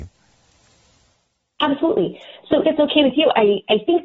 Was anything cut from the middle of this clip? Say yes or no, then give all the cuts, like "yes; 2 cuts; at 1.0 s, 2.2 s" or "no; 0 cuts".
yes; 1 cut; at 2.6 s